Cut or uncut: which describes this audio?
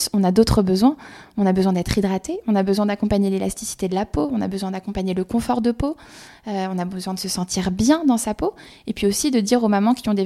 uncut